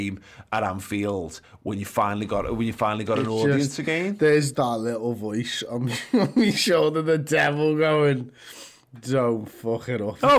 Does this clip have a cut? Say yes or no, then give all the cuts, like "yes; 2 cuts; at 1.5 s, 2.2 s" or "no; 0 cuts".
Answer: yes; 1 cut; at 4.5 s